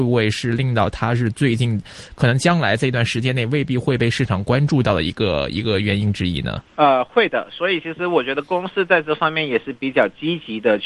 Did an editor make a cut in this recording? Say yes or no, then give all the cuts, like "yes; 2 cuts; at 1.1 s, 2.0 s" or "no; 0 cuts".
yes; 1 cut; at 6.7 s